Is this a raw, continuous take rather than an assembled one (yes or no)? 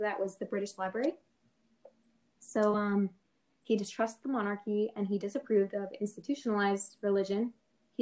yes